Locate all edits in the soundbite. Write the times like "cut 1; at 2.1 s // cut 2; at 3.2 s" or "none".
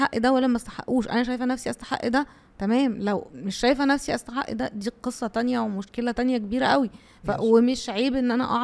none